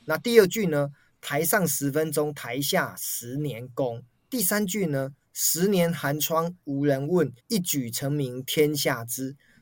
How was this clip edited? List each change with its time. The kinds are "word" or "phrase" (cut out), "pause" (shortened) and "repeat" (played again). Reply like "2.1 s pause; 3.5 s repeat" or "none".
7.4 s pause